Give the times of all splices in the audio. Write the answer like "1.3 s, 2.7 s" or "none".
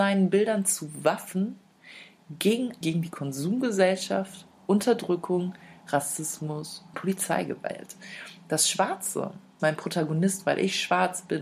2.8 s, 6.9 s, 9.6 s